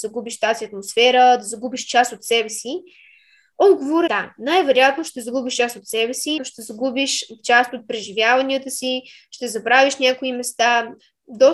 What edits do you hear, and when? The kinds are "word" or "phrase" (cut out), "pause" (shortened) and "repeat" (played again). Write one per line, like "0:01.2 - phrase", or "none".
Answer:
0:04.1 - word
0:06.4 - word